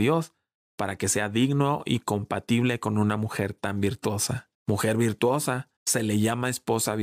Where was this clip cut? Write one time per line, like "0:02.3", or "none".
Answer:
0:04.5
0:05.8